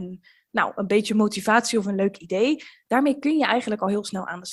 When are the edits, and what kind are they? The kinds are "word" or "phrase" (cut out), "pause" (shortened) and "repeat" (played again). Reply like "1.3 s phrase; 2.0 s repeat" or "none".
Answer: none